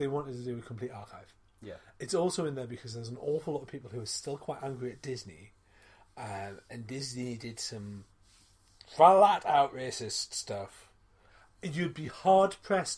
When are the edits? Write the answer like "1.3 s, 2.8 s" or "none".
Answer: none